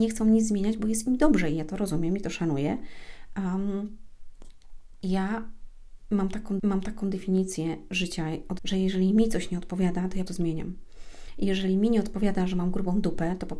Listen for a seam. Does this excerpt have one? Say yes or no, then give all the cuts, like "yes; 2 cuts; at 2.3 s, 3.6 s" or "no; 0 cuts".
yes; 4 cuts; at 5.0 s, 6.6 s, 8.6 s, 10.3 s